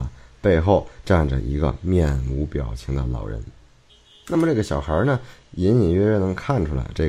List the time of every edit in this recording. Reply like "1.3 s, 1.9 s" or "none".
3.9 s